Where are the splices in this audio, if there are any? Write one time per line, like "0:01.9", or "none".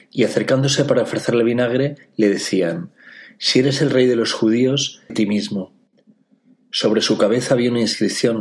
0:05.1